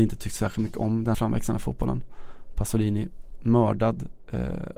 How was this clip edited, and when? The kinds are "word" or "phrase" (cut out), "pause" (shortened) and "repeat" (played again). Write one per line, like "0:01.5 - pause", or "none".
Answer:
0:01.1 - phrase